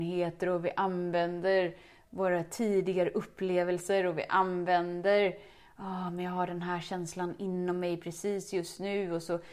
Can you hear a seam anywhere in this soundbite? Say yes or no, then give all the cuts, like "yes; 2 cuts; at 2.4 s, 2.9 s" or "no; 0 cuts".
no; 0 cuts